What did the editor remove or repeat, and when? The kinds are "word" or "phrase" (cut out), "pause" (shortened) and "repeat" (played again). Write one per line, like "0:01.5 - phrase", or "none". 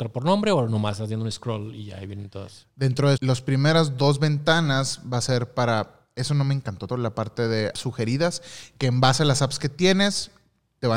0:03.2 - word
0:06.9 - word
0:07.7 - word

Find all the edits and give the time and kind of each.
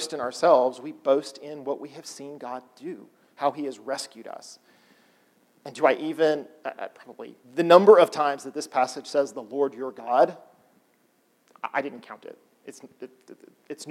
0:07.4 - pause

